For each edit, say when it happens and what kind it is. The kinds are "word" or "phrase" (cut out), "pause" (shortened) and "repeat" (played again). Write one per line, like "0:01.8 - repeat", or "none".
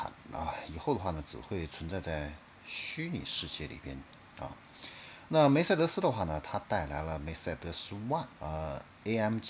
0:08.4 - word

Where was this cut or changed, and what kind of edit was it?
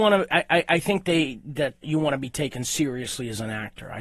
0:01.8 - word

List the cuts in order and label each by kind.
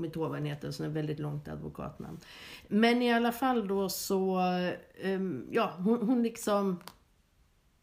none

